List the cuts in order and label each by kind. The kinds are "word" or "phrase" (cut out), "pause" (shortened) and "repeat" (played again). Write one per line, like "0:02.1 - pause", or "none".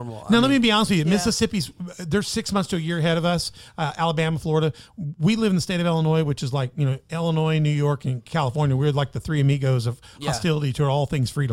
none